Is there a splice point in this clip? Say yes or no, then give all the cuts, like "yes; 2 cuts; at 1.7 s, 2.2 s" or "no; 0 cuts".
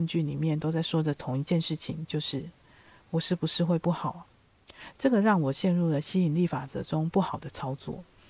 no; 0 cuts